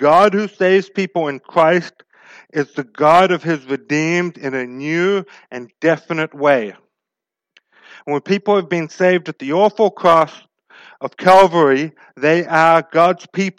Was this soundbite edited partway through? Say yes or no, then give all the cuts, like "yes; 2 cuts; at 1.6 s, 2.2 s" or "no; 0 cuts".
no; 0 cuts